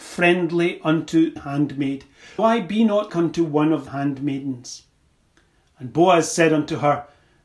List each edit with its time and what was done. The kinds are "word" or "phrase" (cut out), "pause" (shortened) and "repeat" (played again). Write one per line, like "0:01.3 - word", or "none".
0:01.4 - word
0:02.4 - word
0:03.1 - word
0:03.9 - word